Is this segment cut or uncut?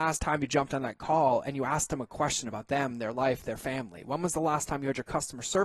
uncut